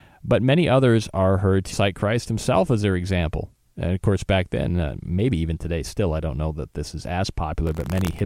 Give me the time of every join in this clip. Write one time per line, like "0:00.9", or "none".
0:01.7

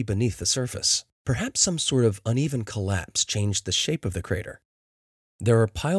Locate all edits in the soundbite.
0:01.1

